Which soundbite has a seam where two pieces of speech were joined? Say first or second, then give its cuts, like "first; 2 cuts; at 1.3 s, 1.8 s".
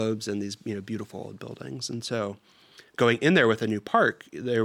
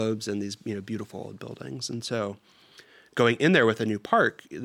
first; 1 cut; at 2.9 s